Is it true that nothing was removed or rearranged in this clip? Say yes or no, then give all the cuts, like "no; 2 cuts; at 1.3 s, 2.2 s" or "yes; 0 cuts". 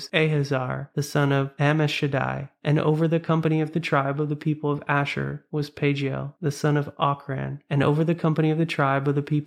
yes; 0 cuts